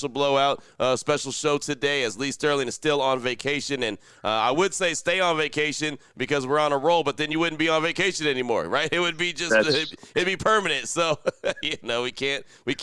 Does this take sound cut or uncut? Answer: uncut